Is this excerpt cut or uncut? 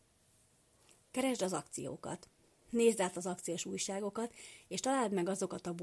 uncut